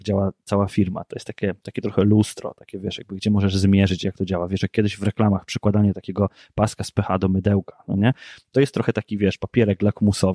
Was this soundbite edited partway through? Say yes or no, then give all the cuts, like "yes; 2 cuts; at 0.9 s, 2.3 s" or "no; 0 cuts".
no; 0 cuts